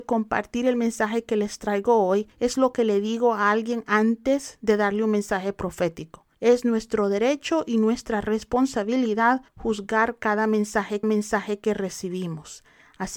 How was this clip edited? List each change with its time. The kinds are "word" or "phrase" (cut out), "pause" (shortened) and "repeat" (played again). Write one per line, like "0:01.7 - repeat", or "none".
0:02.3 - pause
0:06.3 - pause
0:09.5 - pause
0:11.0 - repeat